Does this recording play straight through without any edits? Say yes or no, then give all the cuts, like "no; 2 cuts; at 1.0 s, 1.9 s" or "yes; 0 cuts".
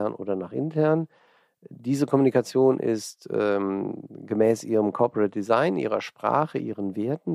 yes; 0 cuts